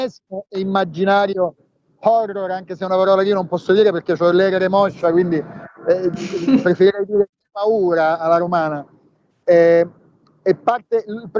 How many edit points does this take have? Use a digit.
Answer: 0